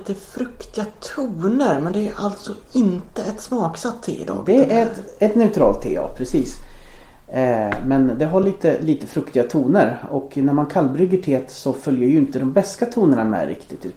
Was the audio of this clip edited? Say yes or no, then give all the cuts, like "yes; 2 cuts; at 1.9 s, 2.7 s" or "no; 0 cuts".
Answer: no; 0 cuts